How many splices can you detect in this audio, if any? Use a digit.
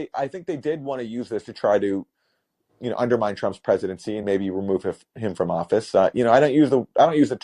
0